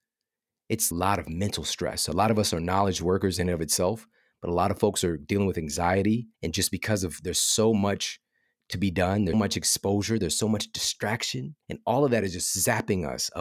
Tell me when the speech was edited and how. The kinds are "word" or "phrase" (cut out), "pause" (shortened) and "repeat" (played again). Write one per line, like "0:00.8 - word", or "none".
0:00.9 - phrase
0:06.3 - pause
0:09.3 - word
0:11.6 - pause